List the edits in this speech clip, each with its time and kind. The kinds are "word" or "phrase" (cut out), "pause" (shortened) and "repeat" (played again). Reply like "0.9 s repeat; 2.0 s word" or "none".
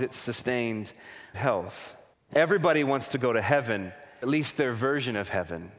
1.3 s phrase; 2.1 s pause; 4.2 s word